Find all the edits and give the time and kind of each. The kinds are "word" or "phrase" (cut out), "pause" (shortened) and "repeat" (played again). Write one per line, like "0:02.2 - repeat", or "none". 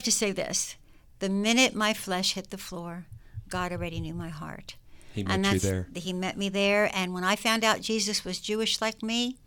none